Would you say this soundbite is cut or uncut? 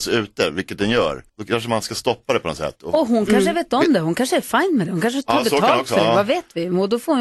cut